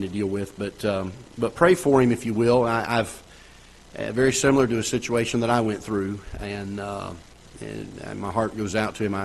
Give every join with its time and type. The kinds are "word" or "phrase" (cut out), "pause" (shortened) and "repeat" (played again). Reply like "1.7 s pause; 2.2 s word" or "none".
none